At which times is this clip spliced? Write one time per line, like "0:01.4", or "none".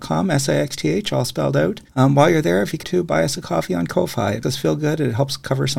0:01.9
0:02.8
0:04.4